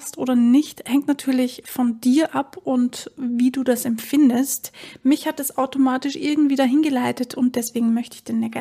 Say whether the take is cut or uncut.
uncut